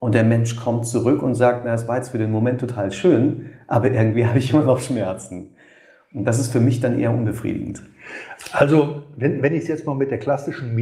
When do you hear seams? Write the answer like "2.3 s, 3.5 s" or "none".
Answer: none